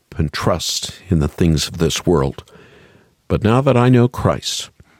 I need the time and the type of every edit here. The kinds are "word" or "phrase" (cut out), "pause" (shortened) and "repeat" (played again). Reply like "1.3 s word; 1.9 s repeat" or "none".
none